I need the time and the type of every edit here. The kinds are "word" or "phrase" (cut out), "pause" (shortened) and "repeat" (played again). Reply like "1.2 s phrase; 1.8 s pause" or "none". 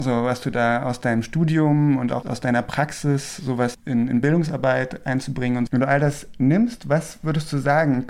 2.2 s word; 3.7 s word; 5.7 s word